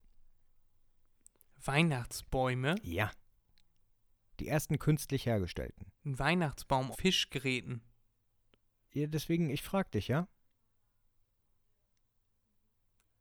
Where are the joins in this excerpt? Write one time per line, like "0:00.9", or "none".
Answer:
0:06.0
0:06.9